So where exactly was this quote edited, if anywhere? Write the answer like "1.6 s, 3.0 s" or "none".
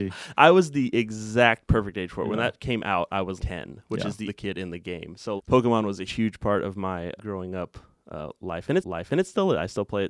3.4 s, 4.3 s, 5.4 s, 6.1 s, 7.2 s, 8.8 s